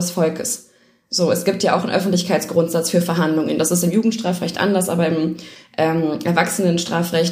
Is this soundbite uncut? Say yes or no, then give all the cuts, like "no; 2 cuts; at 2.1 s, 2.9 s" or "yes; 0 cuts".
yes; 0 cuts